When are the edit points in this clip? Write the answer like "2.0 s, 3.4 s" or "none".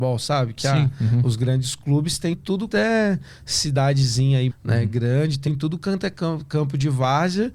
2.3 s, 2.7 s, 4.5 s, 5.5 s